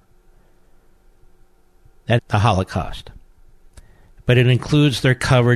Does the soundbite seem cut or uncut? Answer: cut